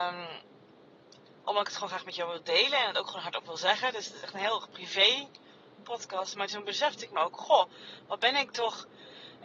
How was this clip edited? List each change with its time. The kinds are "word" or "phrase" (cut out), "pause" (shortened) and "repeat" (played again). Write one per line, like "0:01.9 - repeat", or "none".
none